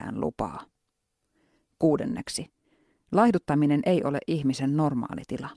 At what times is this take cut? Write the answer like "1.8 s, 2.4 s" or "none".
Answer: none